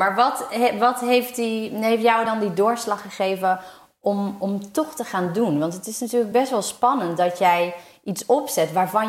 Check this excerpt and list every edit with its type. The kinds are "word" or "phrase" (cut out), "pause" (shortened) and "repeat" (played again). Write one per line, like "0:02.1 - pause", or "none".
none